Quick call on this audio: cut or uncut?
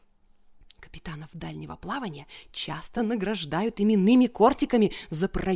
uncut